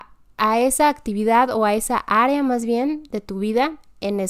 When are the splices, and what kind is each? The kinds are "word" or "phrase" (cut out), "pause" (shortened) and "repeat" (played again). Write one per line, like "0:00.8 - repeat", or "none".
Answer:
none